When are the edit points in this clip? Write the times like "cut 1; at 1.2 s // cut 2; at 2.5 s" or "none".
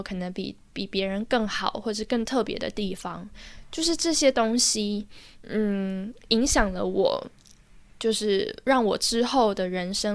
cut 1; at 7.9 s